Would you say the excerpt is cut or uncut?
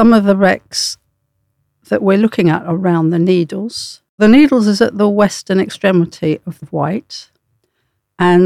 cut